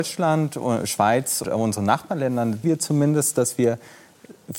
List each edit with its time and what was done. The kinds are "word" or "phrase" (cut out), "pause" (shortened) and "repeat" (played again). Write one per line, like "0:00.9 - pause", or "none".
0:01.4 - word
0:02.6 - word